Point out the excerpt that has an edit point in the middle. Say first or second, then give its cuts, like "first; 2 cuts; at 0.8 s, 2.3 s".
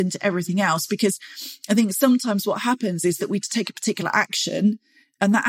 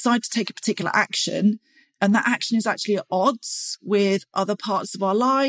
first; 1 cut; at 3.4 s